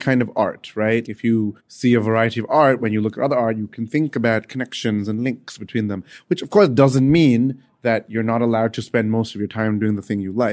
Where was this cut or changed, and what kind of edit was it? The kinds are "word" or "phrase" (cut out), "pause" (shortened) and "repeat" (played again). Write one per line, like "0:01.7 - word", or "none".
0:01.1 - word
0:01.6 - pause